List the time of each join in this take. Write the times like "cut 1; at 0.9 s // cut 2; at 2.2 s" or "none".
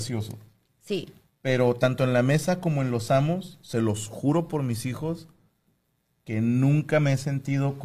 none